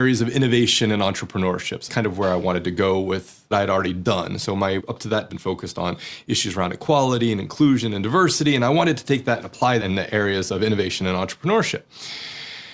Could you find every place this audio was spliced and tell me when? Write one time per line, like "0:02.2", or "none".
0:01.9
0:03.5
0:04.8
0:05.3
0:09.8

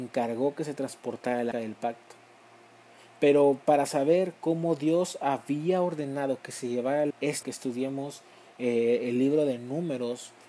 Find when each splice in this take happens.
0:01.5
0:07.1
0:07.4

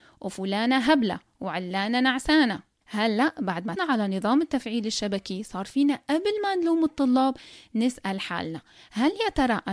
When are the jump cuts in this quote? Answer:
0:03.8

